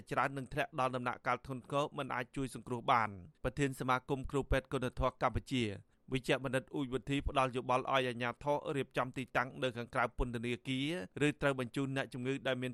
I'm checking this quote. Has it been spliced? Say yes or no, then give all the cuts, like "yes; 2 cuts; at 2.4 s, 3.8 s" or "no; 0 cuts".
yes; 2 cuts; at 3.4 s, 11.1 s